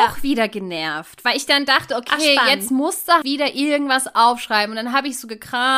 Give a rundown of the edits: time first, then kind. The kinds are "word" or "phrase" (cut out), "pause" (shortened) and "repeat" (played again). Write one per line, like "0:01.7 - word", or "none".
0:03.2 - word